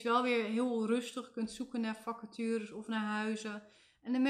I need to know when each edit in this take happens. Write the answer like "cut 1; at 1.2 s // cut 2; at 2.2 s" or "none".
none